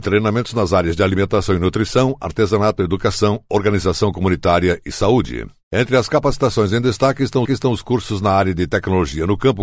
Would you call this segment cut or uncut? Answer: cut